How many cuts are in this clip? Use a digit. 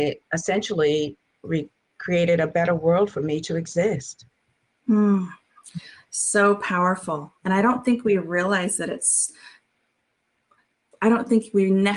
0